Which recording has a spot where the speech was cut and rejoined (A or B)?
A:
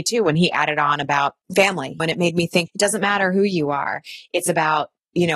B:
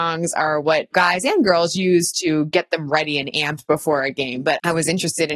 A